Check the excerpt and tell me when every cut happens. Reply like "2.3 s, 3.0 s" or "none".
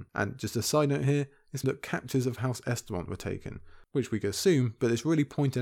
1.6 s